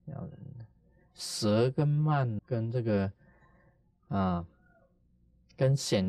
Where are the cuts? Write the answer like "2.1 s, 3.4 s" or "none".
2.4 s